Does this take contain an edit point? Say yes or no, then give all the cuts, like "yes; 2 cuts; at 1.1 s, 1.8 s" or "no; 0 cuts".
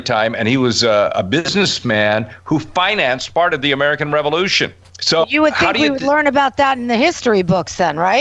yes; 1 cut; at 5.2 s